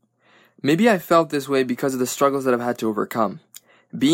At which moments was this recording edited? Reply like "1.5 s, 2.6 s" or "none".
none